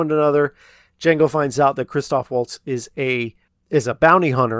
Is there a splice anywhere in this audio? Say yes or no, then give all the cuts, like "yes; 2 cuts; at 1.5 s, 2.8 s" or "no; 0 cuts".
no; 0 cuts